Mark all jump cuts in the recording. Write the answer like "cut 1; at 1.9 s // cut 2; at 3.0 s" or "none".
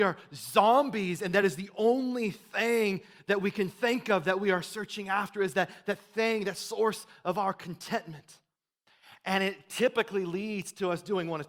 none